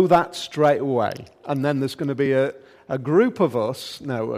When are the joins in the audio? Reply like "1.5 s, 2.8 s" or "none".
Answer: none